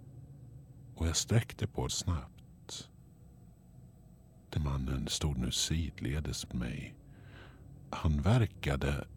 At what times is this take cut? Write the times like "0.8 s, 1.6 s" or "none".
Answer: 1.9 s, 4.6 s, 6.5 s